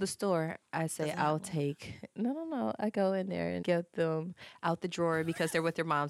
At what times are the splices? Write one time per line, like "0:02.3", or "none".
0:03.6